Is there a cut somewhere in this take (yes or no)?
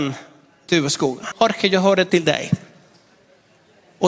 yes